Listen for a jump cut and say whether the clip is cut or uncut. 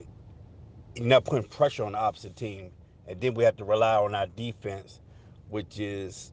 uncut